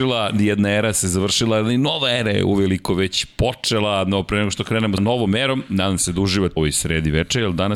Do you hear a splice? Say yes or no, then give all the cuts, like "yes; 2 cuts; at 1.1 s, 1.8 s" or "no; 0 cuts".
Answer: yes; 2 cuts; at 5.0 s, 6.6 s